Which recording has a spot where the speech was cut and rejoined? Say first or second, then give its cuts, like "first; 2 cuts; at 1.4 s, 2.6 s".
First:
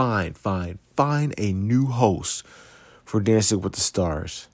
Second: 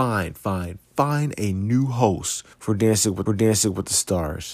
second; 2 cuts; at 2.5 s, 3.3 s